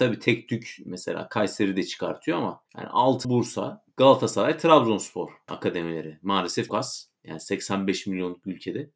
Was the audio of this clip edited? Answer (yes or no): yes